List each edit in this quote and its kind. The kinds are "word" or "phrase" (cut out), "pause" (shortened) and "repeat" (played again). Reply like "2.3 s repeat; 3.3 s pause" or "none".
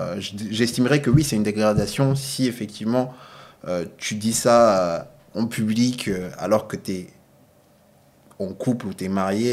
none